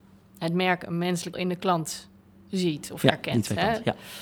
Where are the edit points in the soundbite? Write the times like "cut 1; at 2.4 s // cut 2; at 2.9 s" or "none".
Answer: cut 1; at 1.3 s